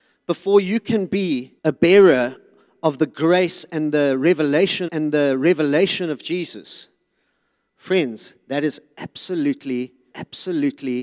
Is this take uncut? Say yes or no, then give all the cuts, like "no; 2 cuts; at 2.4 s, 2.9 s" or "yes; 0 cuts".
no; 3 cuts; at 1.6 s, 4.9 s, 10.1 s